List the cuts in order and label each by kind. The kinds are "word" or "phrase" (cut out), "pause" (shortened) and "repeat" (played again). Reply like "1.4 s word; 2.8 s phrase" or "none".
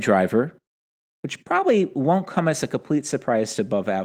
none